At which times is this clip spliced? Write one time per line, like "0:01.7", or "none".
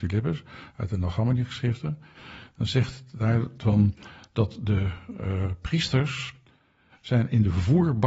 none